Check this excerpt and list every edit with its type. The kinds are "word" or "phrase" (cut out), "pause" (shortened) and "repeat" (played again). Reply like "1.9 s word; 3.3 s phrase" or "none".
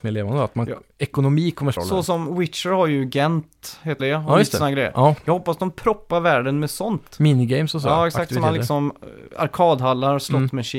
1.8 s word; 4.0 s word